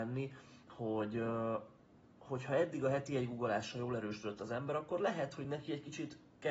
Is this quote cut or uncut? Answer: uncut